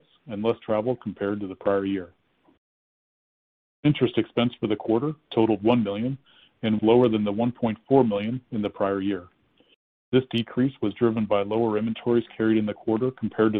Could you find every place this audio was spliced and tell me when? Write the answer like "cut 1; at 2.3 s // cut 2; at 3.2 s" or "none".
cut 1; at 6.8 s